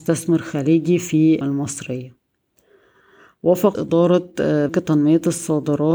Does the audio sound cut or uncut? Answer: cut